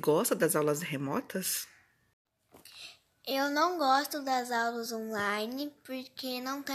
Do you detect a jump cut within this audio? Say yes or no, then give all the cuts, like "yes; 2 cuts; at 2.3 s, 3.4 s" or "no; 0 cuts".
no; 0 cuts